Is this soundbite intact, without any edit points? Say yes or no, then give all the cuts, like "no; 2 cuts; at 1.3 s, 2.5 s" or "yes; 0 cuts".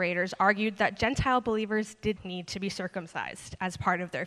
no; 1 cut; at 2.2 s